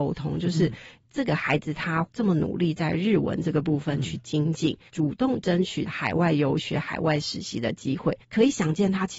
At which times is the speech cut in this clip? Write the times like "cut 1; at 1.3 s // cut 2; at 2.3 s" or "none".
cut 1; at 4.9 s // cut 2; at 8.2 s